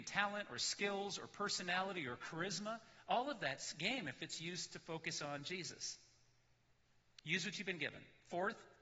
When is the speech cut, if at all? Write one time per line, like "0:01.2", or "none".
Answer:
none